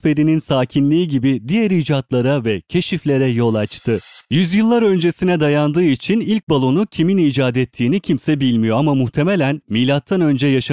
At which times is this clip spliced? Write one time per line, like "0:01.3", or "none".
0:04.2